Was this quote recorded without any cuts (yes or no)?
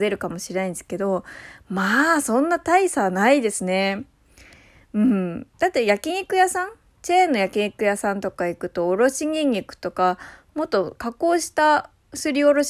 yes